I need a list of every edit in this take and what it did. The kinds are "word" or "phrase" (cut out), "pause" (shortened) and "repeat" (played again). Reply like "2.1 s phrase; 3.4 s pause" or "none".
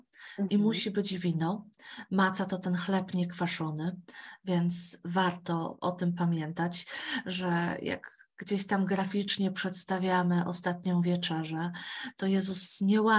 none